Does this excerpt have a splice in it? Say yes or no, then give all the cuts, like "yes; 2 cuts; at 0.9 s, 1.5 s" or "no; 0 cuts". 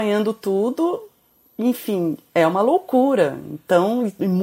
no; 0 cuts